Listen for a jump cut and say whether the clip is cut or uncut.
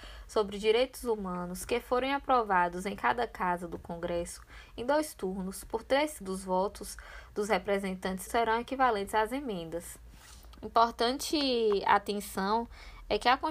cut